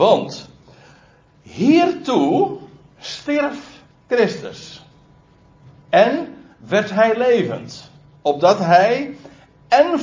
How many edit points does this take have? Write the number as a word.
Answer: zero